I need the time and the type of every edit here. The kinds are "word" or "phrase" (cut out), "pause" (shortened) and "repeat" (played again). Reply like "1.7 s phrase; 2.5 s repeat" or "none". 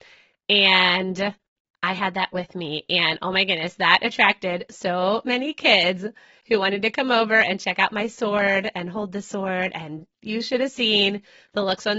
none